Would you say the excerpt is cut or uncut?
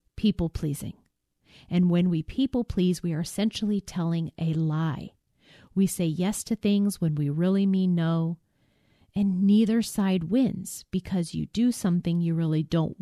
uncut